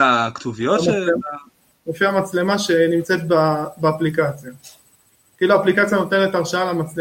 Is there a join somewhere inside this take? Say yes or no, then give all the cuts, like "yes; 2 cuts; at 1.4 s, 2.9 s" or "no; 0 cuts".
no; 0 cuts